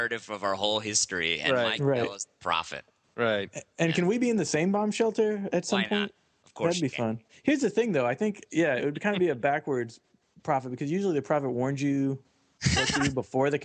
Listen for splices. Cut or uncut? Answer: uncut